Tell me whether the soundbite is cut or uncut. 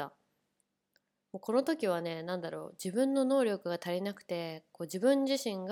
uncut